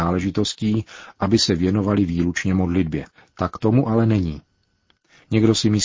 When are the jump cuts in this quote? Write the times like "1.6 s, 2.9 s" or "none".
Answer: 3.1 s